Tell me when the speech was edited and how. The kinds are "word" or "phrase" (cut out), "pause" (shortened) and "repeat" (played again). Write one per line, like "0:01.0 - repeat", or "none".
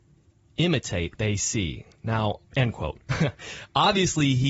0:01.2 - word
0:02.5 - pause